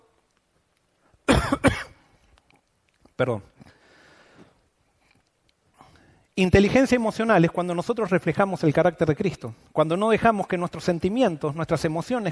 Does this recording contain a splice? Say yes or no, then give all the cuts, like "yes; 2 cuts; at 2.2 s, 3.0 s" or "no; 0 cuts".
no; 0 cuts